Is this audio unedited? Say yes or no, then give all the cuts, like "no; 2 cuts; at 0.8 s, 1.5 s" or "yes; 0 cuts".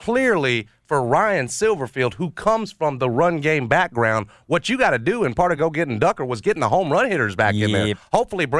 yes; 0 cuts